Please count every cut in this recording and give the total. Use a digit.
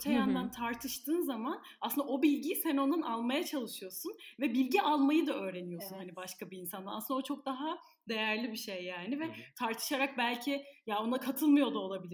0